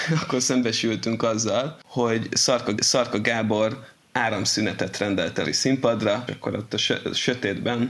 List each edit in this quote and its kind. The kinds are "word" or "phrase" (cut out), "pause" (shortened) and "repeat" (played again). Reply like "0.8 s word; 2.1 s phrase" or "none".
2.8 s repeat; 5.4 s phrase; 6.3 s word